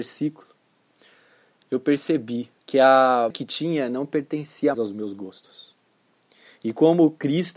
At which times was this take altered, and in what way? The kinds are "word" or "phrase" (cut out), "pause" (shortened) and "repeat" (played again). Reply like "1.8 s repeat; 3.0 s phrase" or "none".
2.6 s pause; 3.3 s word; 4.7 s word